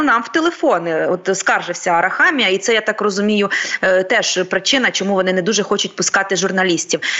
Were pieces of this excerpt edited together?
no; 0 cuts

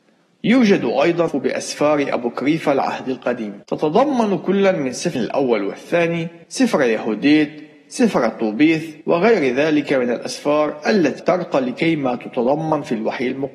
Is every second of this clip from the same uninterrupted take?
no; 6 cuts; at 1.3 s, 3.6 s, 5.1 s, 6.4 s, 9.0 s, 11.2 s

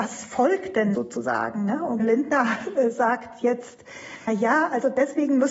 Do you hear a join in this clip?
yes; 3 cuts; at 0.9 s, 2.0 s, 4.3 s

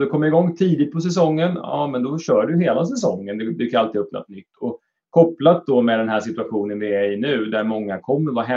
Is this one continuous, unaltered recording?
yes; 0 cuts

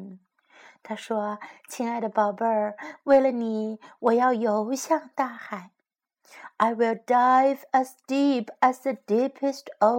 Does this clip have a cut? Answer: no; 0 cuts

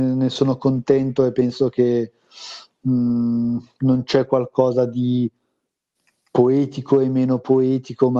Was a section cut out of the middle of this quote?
no; 0 cuts

